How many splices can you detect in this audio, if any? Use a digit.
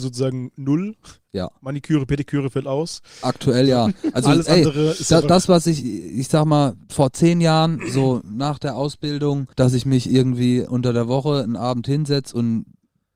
2